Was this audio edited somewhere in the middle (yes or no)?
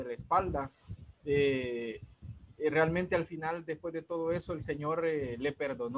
no